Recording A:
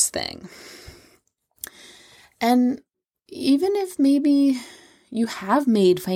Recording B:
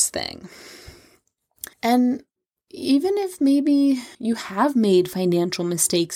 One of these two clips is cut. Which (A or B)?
B